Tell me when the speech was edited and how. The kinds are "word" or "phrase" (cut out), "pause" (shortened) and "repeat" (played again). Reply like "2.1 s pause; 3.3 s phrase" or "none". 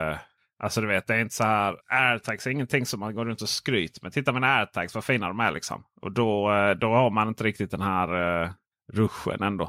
1.8 s pause